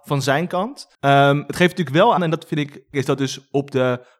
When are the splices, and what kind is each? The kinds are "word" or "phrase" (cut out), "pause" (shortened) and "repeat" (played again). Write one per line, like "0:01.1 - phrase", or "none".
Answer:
0:00.9 - pause
0:02.2 - word
0:02.9 - word